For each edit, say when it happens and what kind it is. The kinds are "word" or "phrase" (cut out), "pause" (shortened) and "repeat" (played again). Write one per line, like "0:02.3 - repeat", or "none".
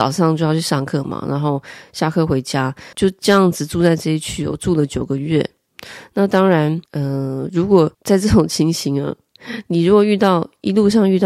0:02.9 - pause
0:06.9 - pause
0:07.9 - pause